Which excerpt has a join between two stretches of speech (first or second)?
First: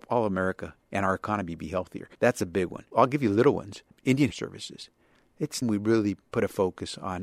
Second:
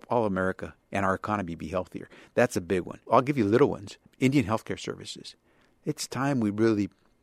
first